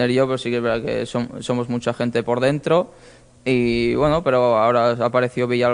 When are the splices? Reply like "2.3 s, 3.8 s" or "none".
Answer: none